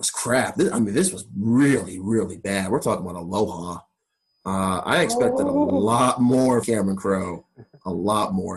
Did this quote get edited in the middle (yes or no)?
yes